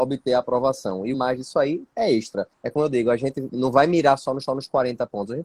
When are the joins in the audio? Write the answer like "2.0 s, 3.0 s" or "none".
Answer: 1.1 s, 2.5 s, 4.5 s